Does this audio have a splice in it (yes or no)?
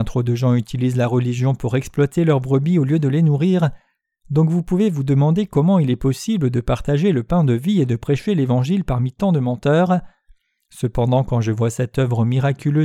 no